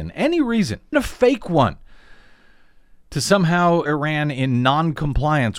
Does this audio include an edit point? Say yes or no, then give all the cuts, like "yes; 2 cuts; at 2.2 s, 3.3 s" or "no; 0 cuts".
yes; 2 cuts; at 0.9 s, 3.9 s